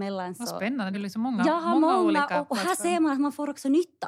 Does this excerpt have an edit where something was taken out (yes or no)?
yes